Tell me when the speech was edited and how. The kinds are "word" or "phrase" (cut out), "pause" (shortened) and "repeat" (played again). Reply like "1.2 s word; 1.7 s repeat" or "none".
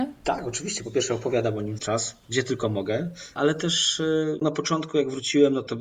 1.8 s word; 4.4 s word